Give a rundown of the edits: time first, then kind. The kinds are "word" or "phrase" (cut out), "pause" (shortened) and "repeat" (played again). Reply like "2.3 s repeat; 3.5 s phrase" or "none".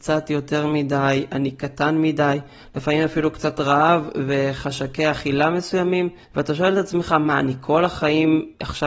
6.2 s pause

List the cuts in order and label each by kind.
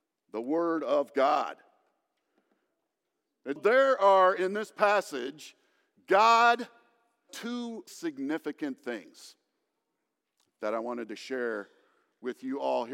3.6 s word; 7.3 s word; 7.9 s word

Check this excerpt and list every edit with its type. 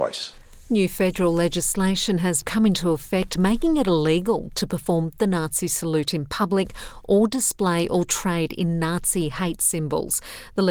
2.4 s word

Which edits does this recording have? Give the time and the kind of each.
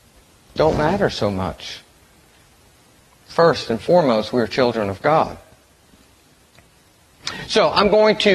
none

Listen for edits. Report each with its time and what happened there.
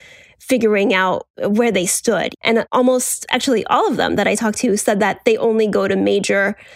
none

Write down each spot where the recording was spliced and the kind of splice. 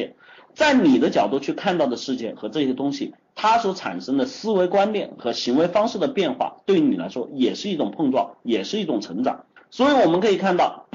9.6 s pause

